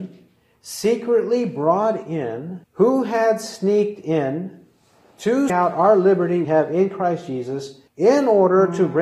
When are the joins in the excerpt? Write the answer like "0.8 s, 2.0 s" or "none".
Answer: 2.6 s, 5.5 s, 6.4 s, 7.9 s